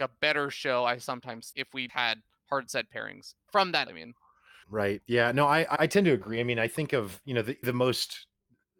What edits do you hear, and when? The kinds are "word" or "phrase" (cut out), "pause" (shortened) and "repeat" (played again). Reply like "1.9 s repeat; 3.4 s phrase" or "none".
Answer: 1.5 s word; 1.9 s word; 3.9 s word; 4.6 s word; 5.8 s word; 7.6 s word